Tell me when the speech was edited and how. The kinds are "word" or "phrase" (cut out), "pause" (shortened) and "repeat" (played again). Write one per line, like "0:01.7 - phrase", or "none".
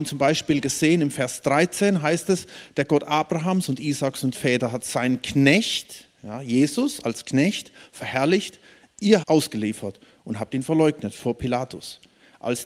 0:04.3 - phrase
0:09.2 - phrase